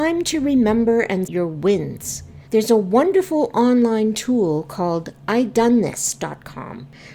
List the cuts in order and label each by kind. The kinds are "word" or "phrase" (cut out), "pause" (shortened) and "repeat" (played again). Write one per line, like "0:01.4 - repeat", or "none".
0:01.3 - word
0:02.5 - pause